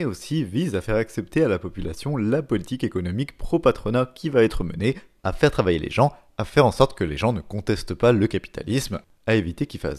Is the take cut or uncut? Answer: uncut